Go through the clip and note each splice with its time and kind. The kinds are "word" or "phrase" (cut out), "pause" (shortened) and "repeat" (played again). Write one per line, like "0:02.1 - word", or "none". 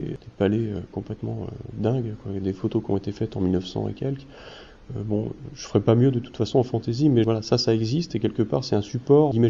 none